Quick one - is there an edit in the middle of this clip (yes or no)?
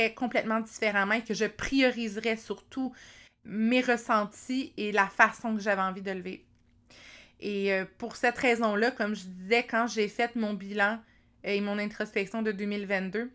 no